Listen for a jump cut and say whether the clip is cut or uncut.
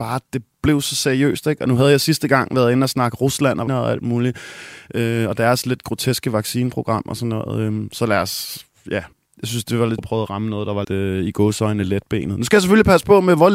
cut